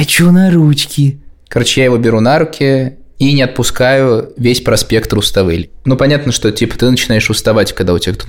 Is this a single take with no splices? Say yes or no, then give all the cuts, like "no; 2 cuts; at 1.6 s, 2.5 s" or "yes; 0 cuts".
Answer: yes; 0 cuts